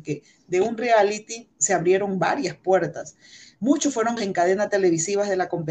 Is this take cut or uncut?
cut